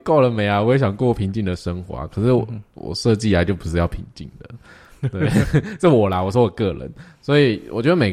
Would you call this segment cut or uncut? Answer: uncut